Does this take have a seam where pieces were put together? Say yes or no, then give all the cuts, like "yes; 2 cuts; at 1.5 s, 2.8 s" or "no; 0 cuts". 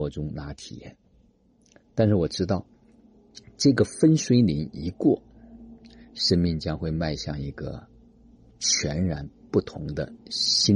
no; 0 cuts